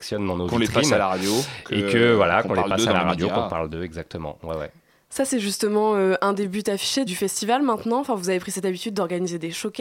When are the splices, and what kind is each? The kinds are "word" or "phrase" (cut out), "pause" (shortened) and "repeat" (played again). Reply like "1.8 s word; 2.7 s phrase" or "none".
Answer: 7.1 s word